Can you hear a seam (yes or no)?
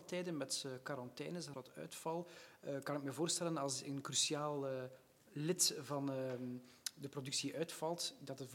yes